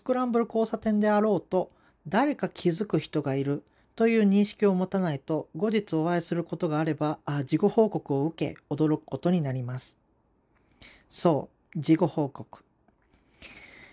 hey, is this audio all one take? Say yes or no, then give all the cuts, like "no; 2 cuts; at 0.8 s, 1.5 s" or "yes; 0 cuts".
yes; 0 cuts